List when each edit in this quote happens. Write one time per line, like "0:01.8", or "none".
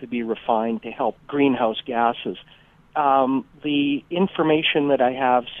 0:01.2